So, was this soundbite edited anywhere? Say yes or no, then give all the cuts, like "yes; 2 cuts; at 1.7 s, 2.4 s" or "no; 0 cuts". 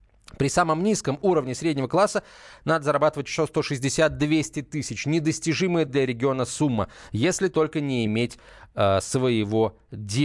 no; 0 cuts